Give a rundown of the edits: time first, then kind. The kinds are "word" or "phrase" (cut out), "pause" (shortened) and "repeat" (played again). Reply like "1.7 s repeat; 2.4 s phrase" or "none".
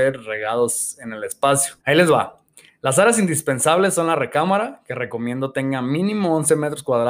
1.8 s pause